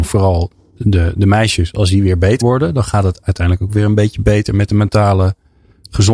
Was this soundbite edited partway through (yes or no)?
yes